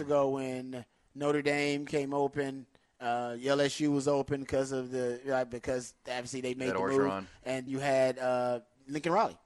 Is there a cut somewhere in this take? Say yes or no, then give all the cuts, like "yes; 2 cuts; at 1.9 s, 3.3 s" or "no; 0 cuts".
yes; 1 cut; at 7.7 s